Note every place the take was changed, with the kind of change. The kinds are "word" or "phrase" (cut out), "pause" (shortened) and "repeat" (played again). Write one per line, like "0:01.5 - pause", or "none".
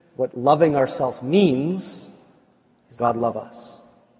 0:03.0 - word